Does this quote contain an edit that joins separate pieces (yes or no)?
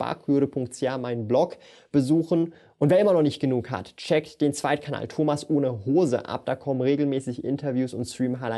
no